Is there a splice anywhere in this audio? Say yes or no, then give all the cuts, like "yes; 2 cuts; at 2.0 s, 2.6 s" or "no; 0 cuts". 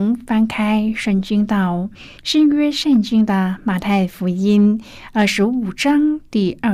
yes; 1 cut; at 2.2 s